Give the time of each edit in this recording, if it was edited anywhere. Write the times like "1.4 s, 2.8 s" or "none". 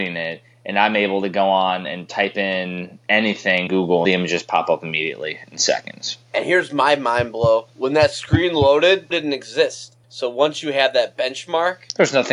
3.7 s, 4.0 s, 6.2 s, 7.7 s, 9.1 s